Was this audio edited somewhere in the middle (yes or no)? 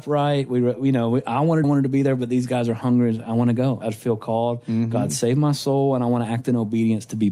yes